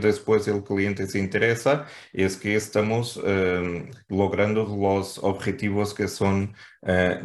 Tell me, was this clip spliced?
no; 0 cuts

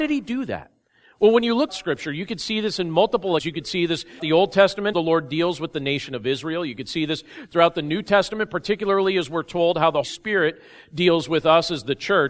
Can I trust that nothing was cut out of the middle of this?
no; 5 cuts; at 1.7 s, 3.4 s, 4.2 s, 4.9 s, 10.0 s

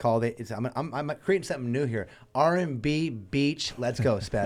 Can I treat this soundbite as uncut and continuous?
yes; 0 cuts

